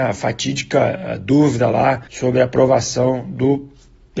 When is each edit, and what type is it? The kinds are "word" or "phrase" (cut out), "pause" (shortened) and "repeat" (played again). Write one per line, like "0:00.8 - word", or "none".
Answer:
0:02.1 - pause